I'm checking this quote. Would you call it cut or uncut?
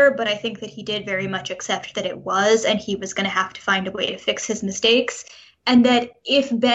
uncut